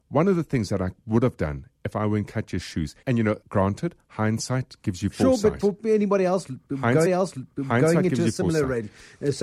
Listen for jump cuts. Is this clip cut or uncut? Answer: cut